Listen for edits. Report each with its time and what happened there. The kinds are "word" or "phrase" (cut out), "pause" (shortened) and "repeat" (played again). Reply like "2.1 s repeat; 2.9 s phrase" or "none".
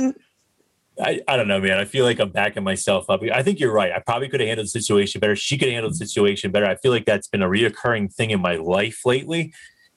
none

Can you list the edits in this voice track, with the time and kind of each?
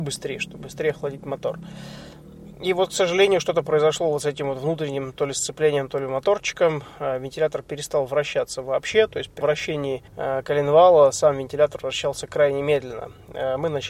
9.4 s word; 10.1 s pause

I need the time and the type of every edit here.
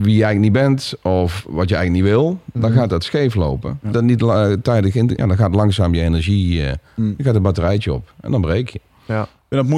3.9 s phrase; 5.2 s phrase

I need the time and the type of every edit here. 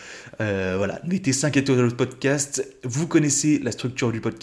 none

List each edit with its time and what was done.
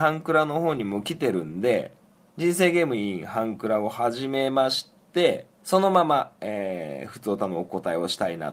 2.1 s pause; 5.5 s pause

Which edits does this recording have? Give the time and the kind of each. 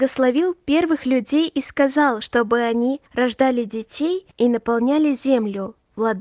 3.1 s pause; 4.3 s pause

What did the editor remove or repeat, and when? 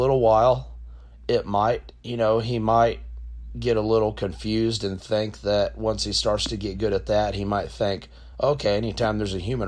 none

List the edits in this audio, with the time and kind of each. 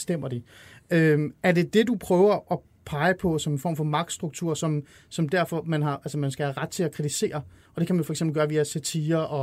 none

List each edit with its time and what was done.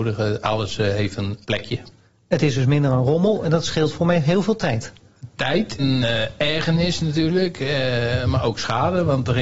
1.4 s pause; 5.8 s word

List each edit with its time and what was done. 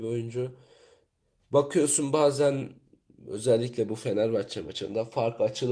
none

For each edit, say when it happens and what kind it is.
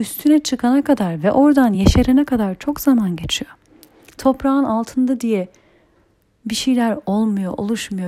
none

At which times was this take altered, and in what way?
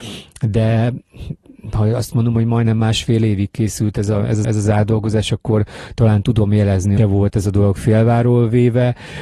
4.4 s repeat; 7.0 s phrase

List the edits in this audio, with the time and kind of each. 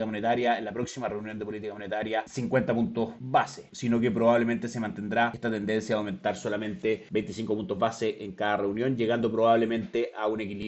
none

